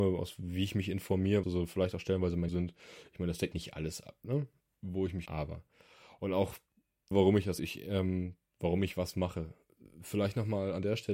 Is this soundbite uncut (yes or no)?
no